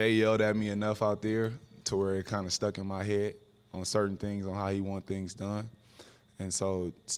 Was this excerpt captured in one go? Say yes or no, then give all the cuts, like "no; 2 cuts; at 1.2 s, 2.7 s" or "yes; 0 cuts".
yes; 0 cuts